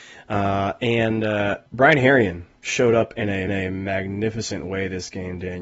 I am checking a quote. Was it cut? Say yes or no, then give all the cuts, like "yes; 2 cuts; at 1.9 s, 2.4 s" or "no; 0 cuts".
yes; 2 cuts; at 1.7 s, 3.5 s